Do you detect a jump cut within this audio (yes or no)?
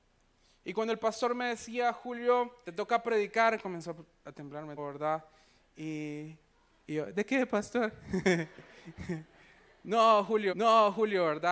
yes